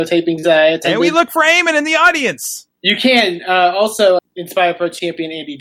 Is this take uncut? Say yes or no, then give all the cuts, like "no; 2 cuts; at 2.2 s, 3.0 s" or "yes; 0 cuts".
no; 1 cut; at 4.2 s